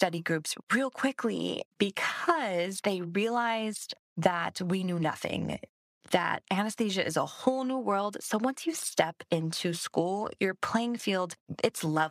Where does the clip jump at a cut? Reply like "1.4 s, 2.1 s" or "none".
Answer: none